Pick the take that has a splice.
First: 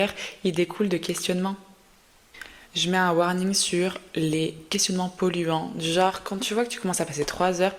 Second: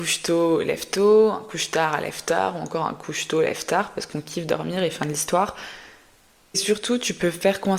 first; 2 cuts; at 2.6 s, 4.7 s

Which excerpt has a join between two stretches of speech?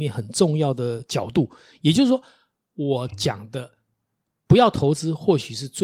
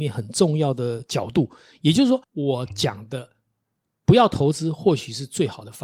second; 1 cut; at 2.2 s

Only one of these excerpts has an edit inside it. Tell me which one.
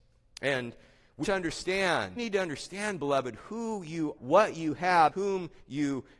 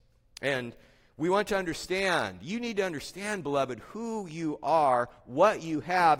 first; 4 cuts; at 1.2 s, 2.2 s, 4.2 s, 5.1 s

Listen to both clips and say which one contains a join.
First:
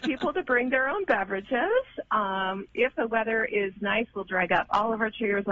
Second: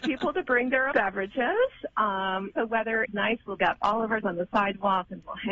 second; 5 cuts; at 0.9 s, 2.5 s, 3.1 s, 3.6 s, 4.2 s

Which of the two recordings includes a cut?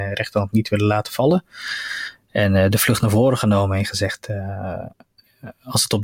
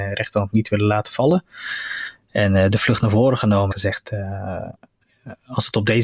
second; 1 cut; at 3.7 s

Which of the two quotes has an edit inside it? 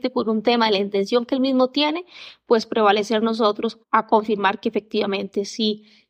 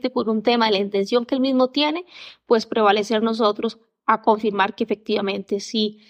first; 1 cut; at 3.8 s

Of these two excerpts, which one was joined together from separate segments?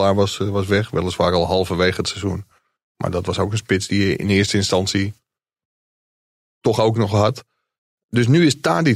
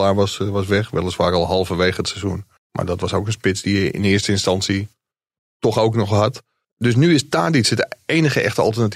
second; 3 cuts; at 2.6 s, 5.4 s, 6.6 s

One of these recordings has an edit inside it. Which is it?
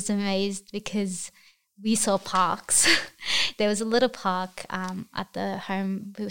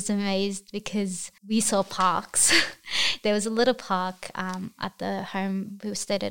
second; 1 cut; at 1.4 s

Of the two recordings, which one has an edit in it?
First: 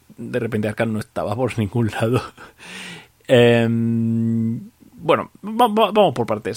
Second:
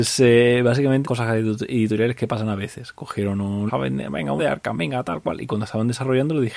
second; 3 cuts; at 1.0 s, 3.7 s, 4.4 s

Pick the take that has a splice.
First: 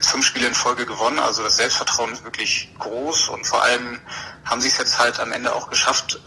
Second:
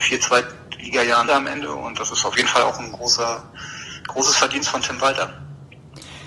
second; 1 cut; at 1.3 s

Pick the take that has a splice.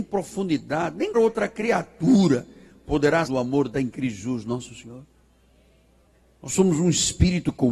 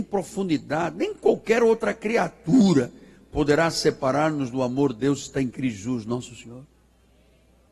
first; 3 cuts; at 1.1 s, 3.2 s, 3.7 s

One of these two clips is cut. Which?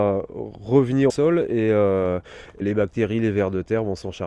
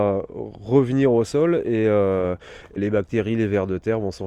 first; 1 cut; at 1.1 s

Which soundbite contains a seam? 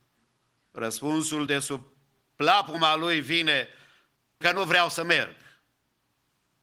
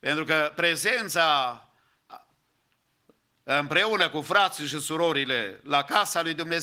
first; 2 cuts; at 1.5 s, 4.4 s

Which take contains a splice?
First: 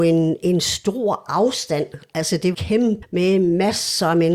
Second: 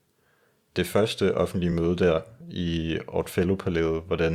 first; 2 cuts; at 2.5 s, 3.0 s

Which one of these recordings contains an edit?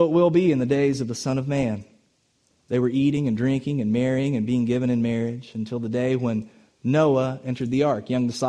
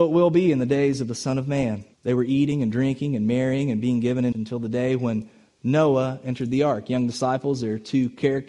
second; 2 cuts; at 1.9 s, 4.3 s

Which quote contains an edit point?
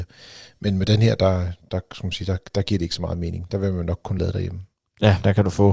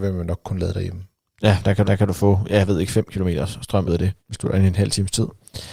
second; 3 cuts; at 1.8 s, 3.9 s, 4.2 s

